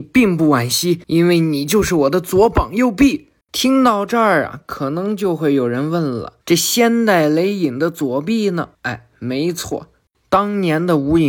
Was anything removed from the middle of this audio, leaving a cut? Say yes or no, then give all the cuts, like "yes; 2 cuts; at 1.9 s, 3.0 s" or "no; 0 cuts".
yes; 3 cuts; at 1.0 s, 6.4 s, 8.7 s